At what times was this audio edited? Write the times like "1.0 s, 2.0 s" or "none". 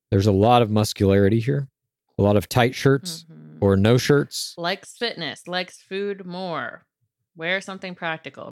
none